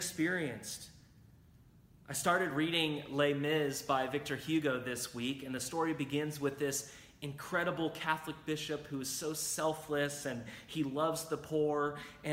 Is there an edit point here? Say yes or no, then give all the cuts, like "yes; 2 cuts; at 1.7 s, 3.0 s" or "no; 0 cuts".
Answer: no; 0 cuts